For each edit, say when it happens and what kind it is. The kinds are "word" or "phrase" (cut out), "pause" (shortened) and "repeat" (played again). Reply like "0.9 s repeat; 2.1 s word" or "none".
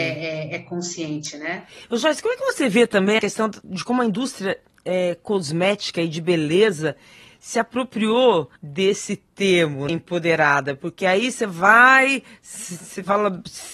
3.2 s word; 8.6 s pause; 9.9 s word